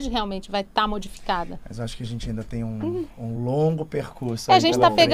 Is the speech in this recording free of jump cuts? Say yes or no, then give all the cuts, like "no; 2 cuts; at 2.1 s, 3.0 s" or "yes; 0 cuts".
yes; 0 cuts